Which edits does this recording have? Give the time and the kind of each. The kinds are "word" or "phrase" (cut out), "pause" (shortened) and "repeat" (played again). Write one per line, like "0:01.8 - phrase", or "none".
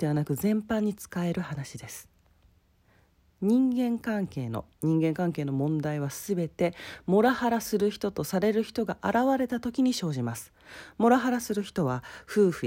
0:04.7 - pause